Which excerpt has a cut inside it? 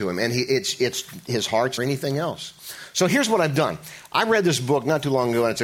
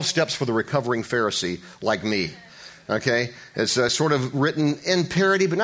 first; 1 cut; at 1.8 s

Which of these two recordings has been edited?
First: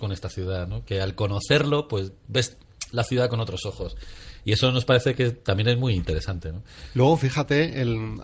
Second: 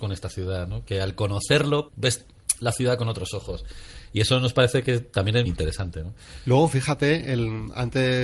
second; 2 cuts; at 1.9 s, 5.5 s

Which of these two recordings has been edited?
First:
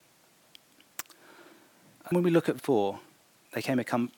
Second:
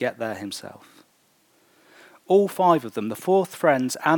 first; 3 cuts; at 2.1 s, 2.6 s, 3.2 s

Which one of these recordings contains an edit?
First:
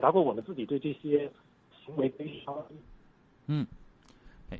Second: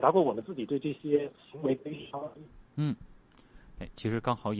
second; 2 cuts; at 1.4 s, 2.7 s

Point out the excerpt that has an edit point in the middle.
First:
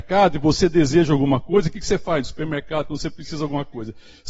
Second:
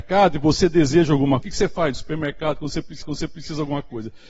second; 2 cuts; at 1.4 s, 3.0 s

